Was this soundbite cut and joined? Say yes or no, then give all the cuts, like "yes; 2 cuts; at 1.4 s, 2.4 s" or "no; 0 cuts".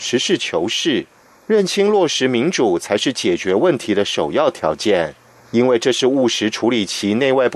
no; 0 cuts